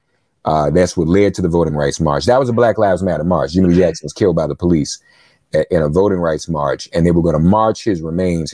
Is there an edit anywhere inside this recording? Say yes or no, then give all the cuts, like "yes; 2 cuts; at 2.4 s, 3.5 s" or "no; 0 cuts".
no; 0 cuts